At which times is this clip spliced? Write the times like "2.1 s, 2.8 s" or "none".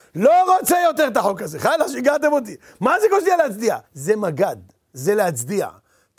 3.8 s